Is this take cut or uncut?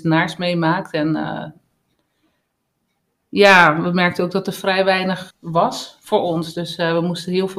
cut